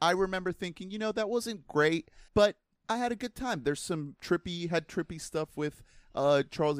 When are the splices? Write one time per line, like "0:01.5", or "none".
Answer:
0:02.3